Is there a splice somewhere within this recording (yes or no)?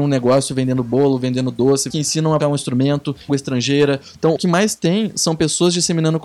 yes